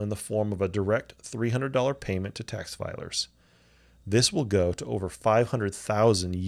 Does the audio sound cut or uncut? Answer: uncut